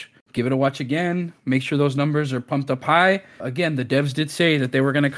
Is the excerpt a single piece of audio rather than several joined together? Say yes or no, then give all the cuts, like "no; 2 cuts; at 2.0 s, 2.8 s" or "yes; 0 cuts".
no; 1 cut; at 3.4 s